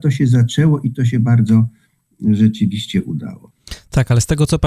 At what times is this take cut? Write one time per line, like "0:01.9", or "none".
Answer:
none